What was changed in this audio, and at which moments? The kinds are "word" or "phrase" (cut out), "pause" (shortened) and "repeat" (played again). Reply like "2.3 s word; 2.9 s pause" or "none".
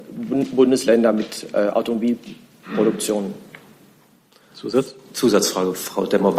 none